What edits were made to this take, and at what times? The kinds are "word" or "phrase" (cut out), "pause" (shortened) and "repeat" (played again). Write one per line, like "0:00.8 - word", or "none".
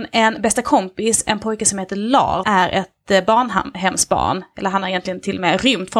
0:02.4 - word

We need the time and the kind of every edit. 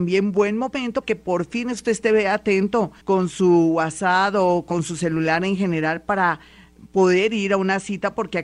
0:01.0 - word
0:03.0 - pause

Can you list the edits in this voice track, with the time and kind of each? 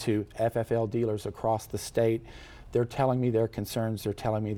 none

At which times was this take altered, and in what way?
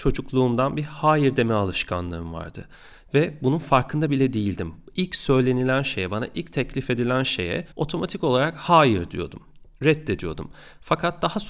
0:07.7 - pause

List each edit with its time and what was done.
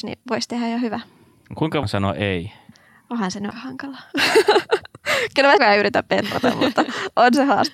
0:01.8 - word
0:02.7 - pause
0:03.5 - word
0:05.6 - phrase

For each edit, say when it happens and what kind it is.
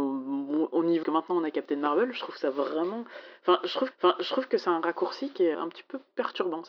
0:01.0 - phrase
0:03.9 - repeat
0:05.5 - word

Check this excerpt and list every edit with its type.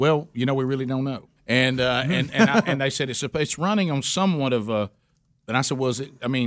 0:01.4 - pause

